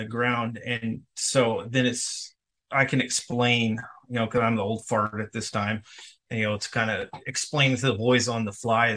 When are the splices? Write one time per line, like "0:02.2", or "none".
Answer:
none